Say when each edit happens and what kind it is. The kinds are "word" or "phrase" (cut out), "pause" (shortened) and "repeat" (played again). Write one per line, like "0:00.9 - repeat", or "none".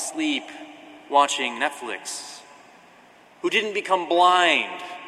none